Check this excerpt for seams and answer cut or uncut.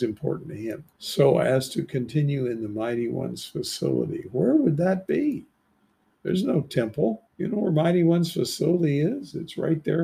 cut